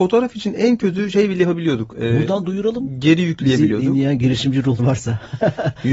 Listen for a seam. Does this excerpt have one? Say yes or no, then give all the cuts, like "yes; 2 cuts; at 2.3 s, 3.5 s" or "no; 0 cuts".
yes; 1 cut; at 4.8 s